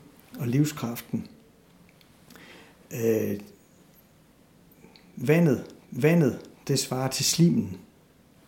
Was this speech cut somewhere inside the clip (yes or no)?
yes